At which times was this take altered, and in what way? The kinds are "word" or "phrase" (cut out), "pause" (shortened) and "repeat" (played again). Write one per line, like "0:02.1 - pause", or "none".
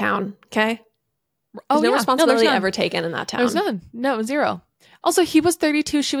none